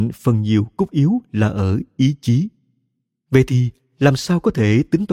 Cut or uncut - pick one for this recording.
uncut